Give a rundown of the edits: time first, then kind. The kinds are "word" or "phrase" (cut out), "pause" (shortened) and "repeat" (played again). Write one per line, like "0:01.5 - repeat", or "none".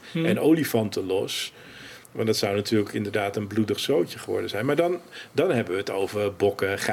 0:02.0 - pause

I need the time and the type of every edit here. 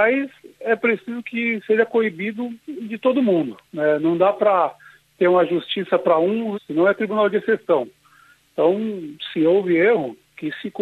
0:03.6 - pause
0:06.5 - phrase

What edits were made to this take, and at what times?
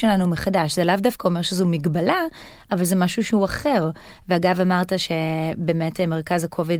none

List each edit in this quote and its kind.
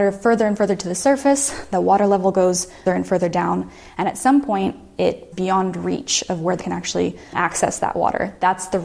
0:02.9 - word
0:05.3 - word
0:06.6 - word
0:07.3 - word

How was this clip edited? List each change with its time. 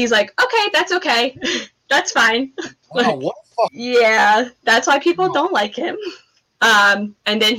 0:03.7 - phrase

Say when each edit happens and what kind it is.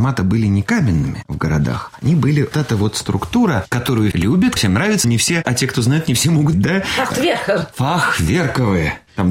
0:02.5 - word
0:04.1 - word
0:04.6 - word
0:05.0 - word
0:05.4 - word
0:06.5 - word

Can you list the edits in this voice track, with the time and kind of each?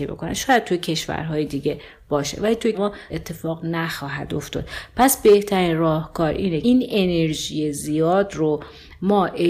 0:02.7 - word
0:03.1 - phrase
0:06.6 - word

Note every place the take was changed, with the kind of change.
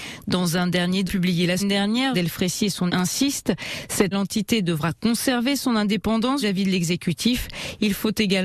0:01.1 - word
0:01.6 - word
0:02.1 - word
0:02.9 - word
0:04.1 - word
0:06.4 - word

